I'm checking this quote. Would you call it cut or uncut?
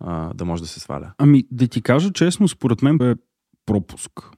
cut